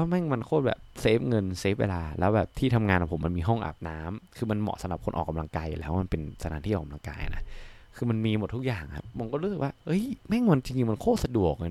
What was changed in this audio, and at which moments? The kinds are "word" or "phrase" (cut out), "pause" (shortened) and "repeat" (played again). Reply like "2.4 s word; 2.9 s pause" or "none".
9.8 s pause